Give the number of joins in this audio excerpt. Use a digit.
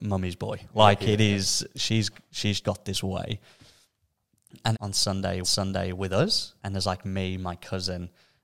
4